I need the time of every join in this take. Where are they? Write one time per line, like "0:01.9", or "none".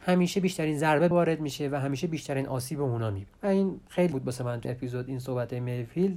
0:01.1
0:04.1
0:04.6